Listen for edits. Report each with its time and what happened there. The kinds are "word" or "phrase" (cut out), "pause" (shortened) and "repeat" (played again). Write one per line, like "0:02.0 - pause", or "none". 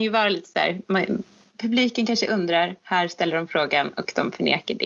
none